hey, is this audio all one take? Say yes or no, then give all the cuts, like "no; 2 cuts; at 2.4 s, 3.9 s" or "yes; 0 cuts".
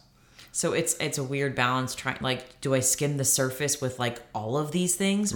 yes; 0 cuts